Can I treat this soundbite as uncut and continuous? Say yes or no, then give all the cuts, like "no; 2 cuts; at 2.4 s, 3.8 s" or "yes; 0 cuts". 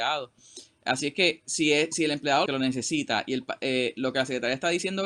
no; 1 cut; at 2.5 s